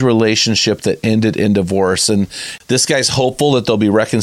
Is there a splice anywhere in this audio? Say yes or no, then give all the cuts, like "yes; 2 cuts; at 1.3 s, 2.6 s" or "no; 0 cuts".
no; 0 cuts